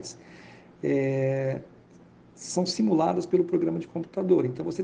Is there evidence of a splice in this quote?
no; 0 cuts

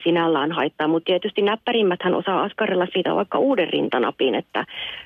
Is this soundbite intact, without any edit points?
yes; 0 cuts

